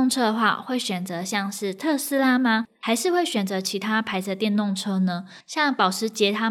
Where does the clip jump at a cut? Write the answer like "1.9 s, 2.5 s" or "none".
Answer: 5.4 s